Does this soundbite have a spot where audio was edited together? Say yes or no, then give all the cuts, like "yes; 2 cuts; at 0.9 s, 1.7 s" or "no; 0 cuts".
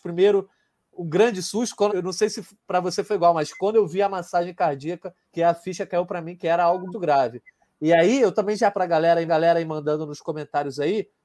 yes; 5 cuts; at 1.9 s, 5.2 s, 6.9 s, 8.7 s, 9.3 s